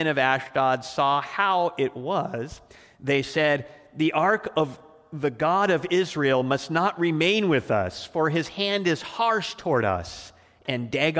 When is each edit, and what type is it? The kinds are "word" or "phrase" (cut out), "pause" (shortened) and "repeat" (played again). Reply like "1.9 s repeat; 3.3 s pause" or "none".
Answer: none